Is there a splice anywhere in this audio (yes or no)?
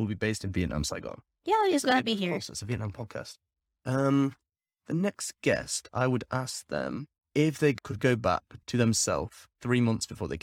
no